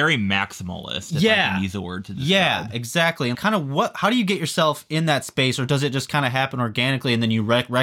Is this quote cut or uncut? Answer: cut